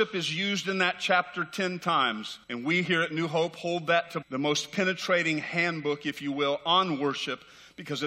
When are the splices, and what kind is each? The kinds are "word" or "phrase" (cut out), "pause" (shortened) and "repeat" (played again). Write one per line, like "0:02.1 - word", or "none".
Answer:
0:02.4 - pause
0:04.2 - word